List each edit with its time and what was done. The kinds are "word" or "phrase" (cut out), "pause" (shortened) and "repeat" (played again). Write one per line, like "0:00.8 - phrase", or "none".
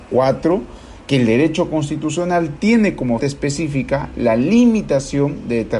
0:03.2 - word